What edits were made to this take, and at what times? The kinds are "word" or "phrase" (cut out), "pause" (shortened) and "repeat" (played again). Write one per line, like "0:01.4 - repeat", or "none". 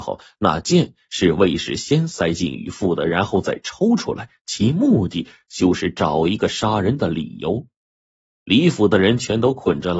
none